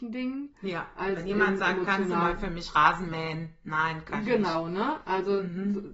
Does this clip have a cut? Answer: no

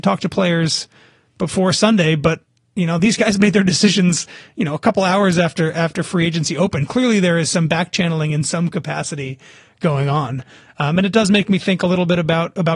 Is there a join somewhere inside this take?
no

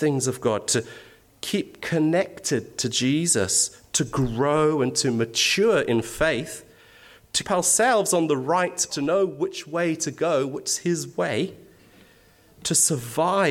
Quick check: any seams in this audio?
yes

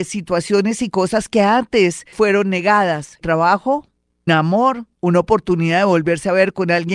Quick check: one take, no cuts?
no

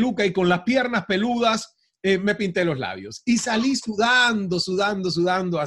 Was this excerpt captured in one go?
yes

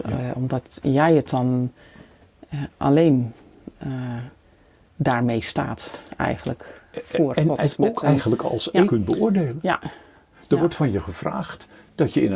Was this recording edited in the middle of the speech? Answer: yes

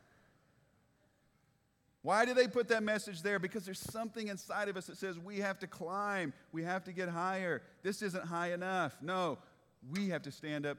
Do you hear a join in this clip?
no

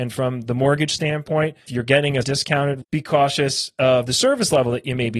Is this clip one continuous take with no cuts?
no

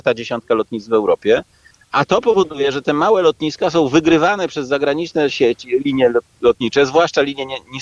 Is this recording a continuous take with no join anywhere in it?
yes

